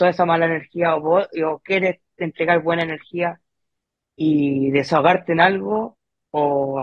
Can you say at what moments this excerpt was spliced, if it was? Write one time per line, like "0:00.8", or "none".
none